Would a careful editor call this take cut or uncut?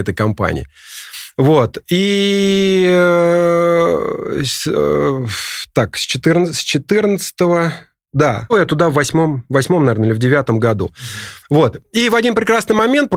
cut